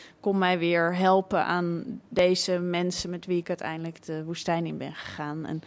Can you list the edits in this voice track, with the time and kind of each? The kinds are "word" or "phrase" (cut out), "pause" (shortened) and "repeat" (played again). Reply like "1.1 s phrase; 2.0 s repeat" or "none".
2.1 s pause